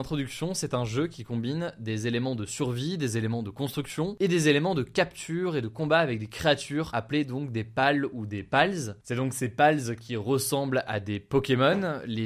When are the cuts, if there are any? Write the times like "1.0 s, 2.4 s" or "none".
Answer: none